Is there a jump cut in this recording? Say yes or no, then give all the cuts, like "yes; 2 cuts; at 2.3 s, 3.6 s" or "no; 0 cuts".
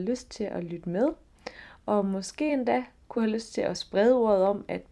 no; 0 cuts